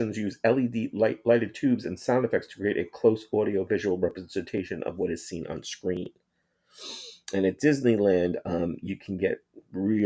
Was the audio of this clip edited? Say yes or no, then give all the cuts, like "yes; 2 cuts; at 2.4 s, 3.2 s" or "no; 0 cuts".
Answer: no; 0 cuts